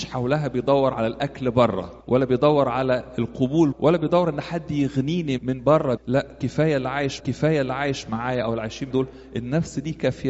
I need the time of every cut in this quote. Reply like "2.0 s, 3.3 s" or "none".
2.0 s, 3.7 s, 5.4 s, 6.0 s, 7.2 s, 8.9 s